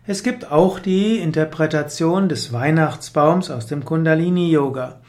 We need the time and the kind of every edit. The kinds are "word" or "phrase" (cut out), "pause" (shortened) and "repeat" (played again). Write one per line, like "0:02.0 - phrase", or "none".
none